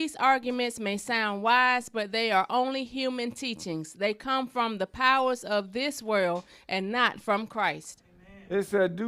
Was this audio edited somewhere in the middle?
no; 0 cuts

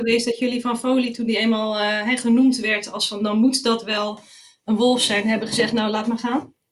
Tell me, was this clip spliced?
no; 0 cuts

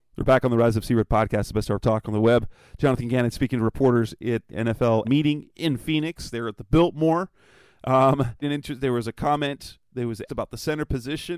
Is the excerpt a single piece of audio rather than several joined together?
no; 5 cuts; at 1.8 s, 4.5 s, 5.0 s, 8.4 s, 10.3 s

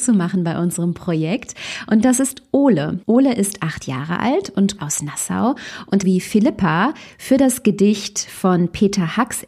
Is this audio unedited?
no; 3 cuts; at 3.0 s, 4.8 s, 6.0 s

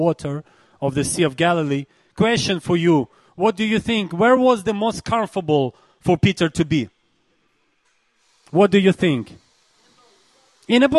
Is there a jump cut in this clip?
no; 0 cuts

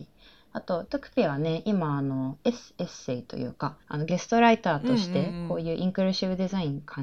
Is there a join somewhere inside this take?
yes; 1 cut; at 3.8 s

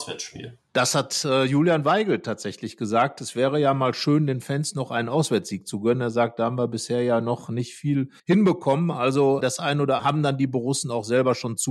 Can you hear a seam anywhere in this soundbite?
yes; 3 cuts; at 8.2 s, 9.4 s, 10.0 s

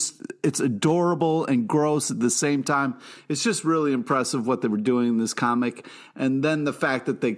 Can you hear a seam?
no; 0 cuts

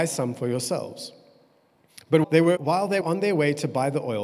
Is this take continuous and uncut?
no; 3 cuts; at 2.2 s, 2.6 s, 3.0 s

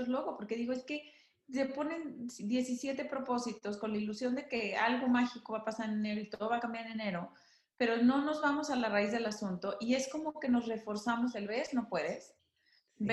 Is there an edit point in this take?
no; 0 cuts

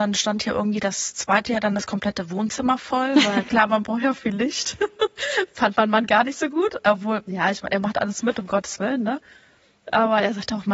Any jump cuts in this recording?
no; 0 cuts

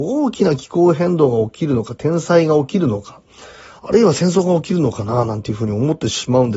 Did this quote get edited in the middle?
no; 0 cuts

